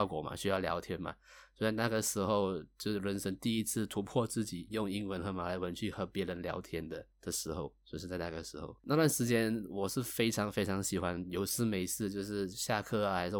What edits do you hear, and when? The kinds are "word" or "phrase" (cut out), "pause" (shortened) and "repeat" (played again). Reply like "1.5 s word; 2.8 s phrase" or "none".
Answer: 7.1 s pause; 8.8 s pause